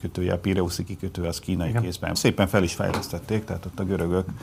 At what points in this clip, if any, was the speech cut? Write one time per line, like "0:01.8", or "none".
0:02.2

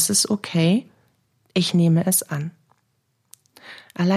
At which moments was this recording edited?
none

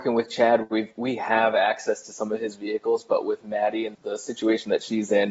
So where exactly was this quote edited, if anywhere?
0:03.9

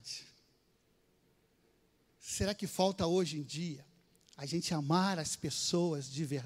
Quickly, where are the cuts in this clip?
none

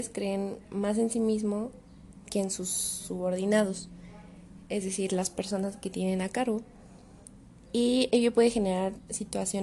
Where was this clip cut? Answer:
none

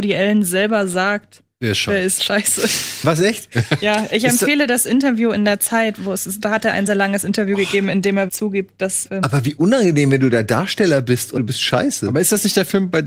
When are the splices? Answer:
0:06.0
0:06.9
0:08.3
0:09.0
0:11.4

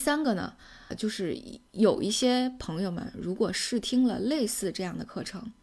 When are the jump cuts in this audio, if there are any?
0:00.9

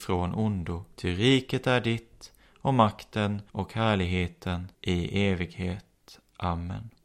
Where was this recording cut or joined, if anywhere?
0:00.9
0:03.5
0:04.7

